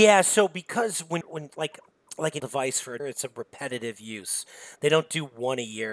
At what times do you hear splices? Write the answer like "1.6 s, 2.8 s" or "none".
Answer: 1.2 s, 2.4 s, 3.0 s